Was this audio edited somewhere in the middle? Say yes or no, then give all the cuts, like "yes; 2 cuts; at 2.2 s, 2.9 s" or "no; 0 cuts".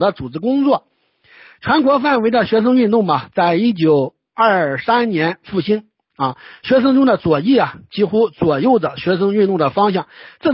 no; 0 cuts